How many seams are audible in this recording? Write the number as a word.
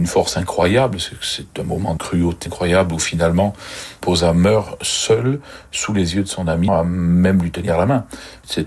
three